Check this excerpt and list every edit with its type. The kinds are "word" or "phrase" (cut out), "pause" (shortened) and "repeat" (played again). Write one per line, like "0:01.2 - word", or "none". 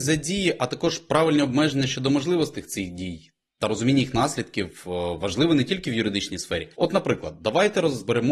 0:03.5 - pause
0:06.7 - pause